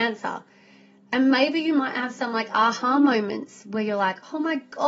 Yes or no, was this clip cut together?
no